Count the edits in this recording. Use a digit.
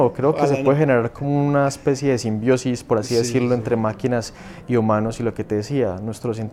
0